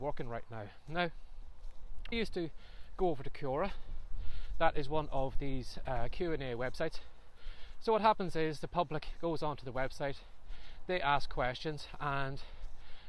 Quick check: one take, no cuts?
no; 1 cut; at 2.1 s

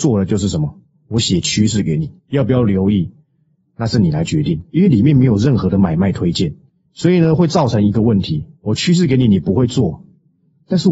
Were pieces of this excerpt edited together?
yes; 1 cut; at 2.2 s

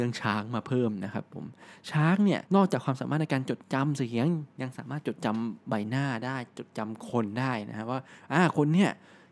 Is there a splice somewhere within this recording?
yes; 1 cut; at 2.5 s

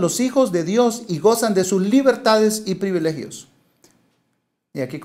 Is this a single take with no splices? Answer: yes; 0 cuts

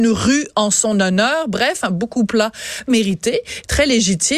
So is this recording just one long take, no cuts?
no; 2 cuts; at 2.1 s, 2.9 s

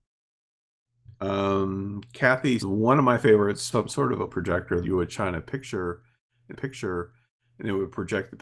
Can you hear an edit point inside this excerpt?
yes; 6 cuts; at 1.1 s, 2.6 s, 3.7 s, 4.3 s, 4.8 s, 6.5 s

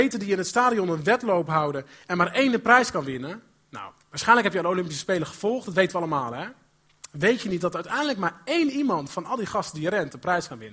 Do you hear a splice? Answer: no; 0 cuts

